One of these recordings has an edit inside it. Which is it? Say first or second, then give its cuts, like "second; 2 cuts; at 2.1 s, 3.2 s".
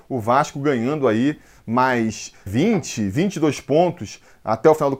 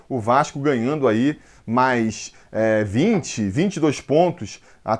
first; 1 cut; at 2.5 s